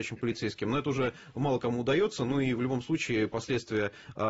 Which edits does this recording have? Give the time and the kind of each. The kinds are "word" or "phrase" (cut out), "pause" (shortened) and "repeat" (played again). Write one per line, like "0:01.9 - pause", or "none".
none